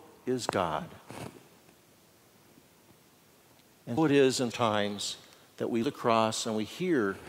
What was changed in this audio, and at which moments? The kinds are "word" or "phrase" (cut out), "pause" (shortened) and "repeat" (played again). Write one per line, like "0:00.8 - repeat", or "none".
0:04.0 - word
0:04.5 - word
0:05.8 - phrase